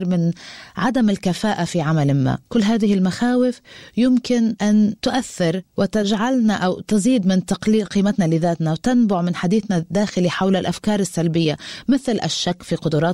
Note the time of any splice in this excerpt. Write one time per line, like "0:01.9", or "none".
0:02.5